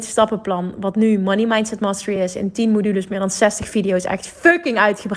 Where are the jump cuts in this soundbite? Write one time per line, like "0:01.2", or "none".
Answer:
none